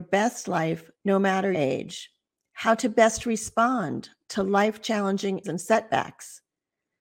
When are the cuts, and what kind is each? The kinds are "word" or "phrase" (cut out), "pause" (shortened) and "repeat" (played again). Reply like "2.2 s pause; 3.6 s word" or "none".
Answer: 1.5 s word; 5.4 s word